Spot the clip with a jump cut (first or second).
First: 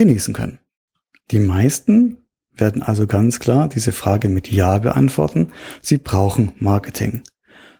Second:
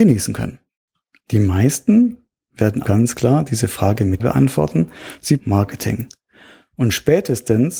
second